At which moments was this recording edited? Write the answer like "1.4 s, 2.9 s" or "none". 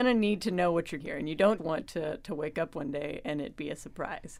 1.0 s, 1.6 s